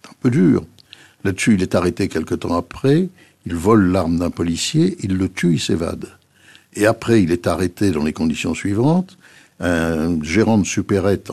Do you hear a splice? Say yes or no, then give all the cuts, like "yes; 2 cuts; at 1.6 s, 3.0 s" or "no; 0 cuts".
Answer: no; 0 cuts